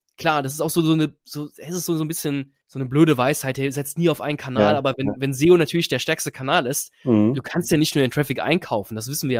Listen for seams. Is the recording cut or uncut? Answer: cut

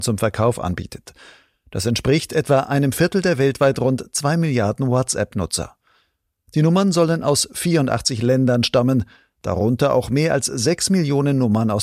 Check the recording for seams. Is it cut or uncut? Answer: uncut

